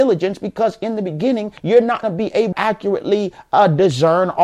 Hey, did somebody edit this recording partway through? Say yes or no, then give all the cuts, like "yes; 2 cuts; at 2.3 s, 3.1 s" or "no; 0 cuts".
yes; 3 cuts; at 1.6 s, 2.0 s, 2.5 s